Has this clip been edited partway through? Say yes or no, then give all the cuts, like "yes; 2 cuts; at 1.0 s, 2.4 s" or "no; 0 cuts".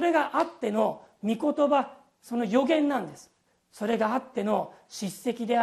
no; 0 cuts